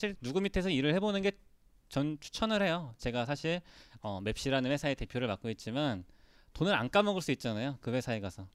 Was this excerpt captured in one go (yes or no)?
yes